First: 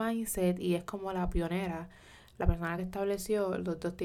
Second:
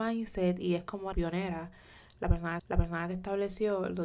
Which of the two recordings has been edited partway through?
second; 2 cuts; at 1.1 s, 2.6 s

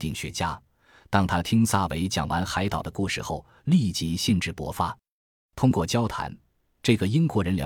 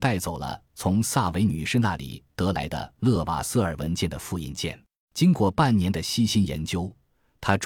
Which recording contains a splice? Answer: second; 1 cut; at 5.0 s

